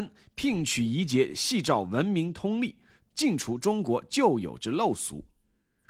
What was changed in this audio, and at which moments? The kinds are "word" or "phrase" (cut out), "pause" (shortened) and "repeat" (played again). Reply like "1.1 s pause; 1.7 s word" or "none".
none